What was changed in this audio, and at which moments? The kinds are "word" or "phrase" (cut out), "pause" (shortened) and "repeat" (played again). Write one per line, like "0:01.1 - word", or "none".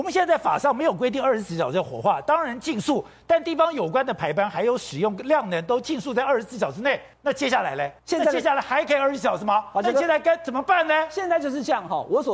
0:07.1 - pause
0:08.0 - pause